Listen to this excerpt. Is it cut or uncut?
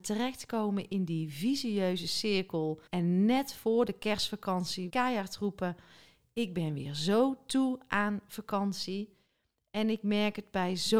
cut